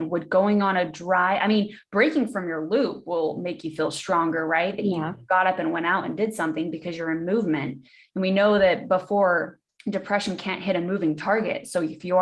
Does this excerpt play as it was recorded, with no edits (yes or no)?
no